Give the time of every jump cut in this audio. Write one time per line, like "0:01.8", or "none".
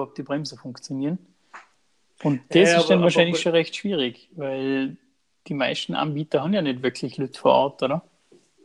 none

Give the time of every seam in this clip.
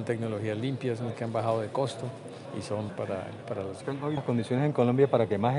0:01.1
0:02.9
0:03.4
0:03.8
0:04.2

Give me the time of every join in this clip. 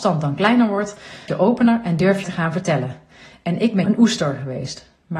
0:01.3
0:02.2
0:03.8

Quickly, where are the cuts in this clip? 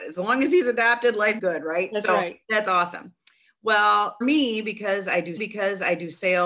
0:01.4
0:02.4
0:04.2
0:05.4

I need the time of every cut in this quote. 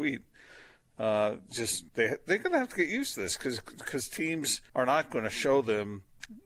0:01.9
0:04.7

